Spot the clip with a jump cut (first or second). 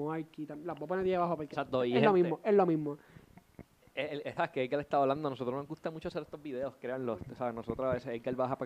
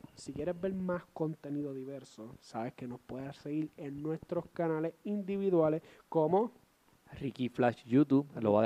first